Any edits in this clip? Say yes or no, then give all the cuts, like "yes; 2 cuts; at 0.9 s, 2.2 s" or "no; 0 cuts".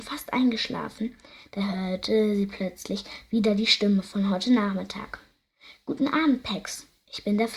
no; 0 cuts